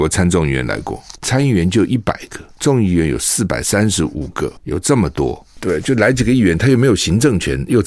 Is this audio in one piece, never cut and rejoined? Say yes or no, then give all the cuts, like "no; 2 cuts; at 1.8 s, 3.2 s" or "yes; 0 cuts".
no; 2 cuts; at 1.2 s, 4.6 s